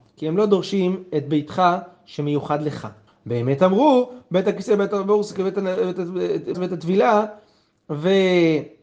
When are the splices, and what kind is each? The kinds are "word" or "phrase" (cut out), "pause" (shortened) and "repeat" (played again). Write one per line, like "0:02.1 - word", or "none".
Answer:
0:03.1 - pause
0:06.5 - word